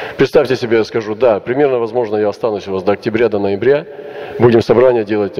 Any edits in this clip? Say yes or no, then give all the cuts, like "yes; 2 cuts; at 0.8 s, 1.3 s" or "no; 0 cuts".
no; 0 cuts